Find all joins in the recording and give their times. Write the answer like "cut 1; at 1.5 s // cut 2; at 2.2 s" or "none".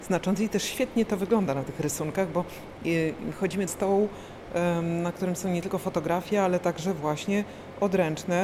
cut 1; at 3.7 s